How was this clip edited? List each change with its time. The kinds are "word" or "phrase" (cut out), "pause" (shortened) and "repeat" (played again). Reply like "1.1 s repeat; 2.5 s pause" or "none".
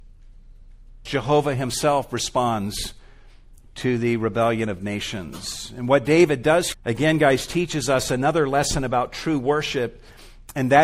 1.1 s word; 6.7 s word

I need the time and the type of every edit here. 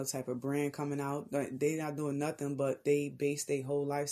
none

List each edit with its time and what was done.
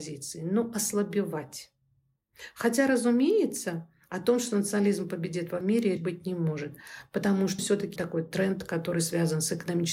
5.6 s word; 6.0 s word; 7.6 s word; 8.0 s word

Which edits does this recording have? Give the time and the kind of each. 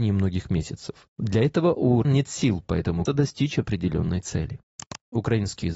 2.0 s word; 3.1 s phrase

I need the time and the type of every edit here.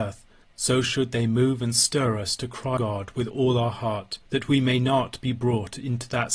2.8 s word; 4.2 s pause

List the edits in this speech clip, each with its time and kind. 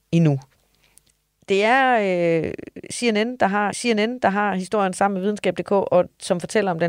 3.7 s repeat

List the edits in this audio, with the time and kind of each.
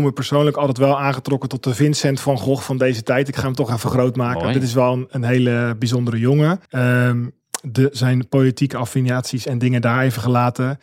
6.7 s pause

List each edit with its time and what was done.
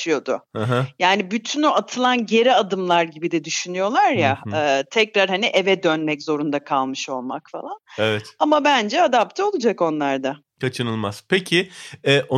none

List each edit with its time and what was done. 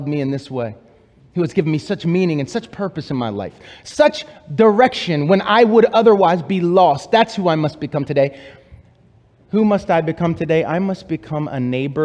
none

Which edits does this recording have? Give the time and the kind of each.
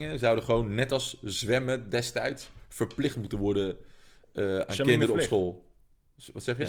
none

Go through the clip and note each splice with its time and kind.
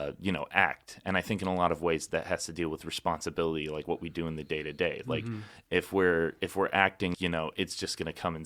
7.1 s word

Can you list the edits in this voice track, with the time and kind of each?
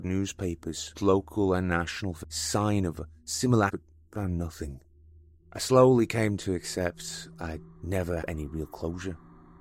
1.0 s word; 2.2 s word; 3.7 s word; 5.4 s pause; 8.2 s word

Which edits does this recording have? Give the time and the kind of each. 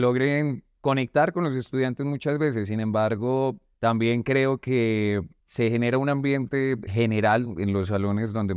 3.7 s pause; 5.4 s pause; 6.9 s word

